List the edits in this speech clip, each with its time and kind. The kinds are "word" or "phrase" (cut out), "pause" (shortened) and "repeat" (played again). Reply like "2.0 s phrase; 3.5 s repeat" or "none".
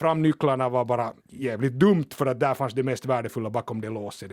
1.2 s pause